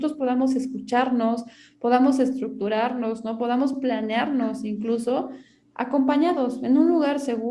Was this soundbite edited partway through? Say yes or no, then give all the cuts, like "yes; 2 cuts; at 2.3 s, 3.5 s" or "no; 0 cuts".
no; 0 cuts